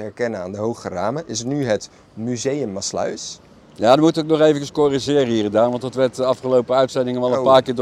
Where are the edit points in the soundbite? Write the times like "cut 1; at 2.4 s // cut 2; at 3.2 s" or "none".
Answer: none